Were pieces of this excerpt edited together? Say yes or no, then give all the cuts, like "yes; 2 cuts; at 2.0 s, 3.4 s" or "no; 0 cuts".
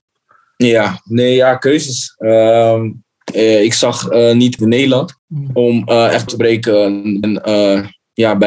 yes; 4 cuts; at 4.6 s, 5.2 s, 6.3 s, 7.2 s